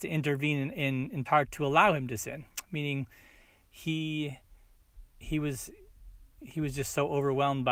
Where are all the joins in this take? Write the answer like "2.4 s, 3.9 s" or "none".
1.3 s